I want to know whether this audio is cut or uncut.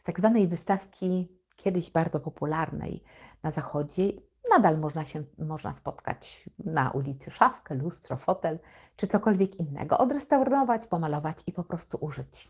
uncut